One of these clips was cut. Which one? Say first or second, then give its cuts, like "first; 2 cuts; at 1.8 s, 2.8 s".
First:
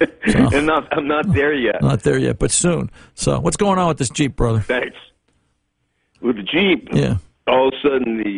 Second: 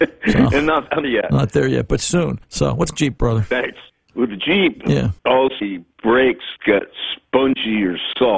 second; 6 cuts; at 1.0 s, 2.4 s, 2.9 s, 3.9 s, 5.2 s, 5.6 s